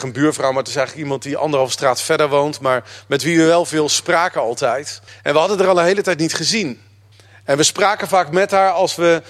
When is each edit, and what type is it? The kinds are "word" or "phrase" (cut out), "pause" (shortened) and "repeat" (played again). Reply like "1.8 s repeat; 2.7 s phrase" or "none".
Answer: 5.1 s pause; 7.1 s pause